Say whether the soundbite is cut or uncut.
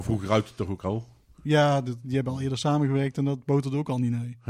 uncut